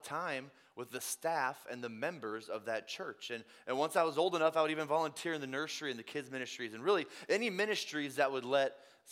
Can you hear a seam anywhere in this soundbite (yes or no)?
no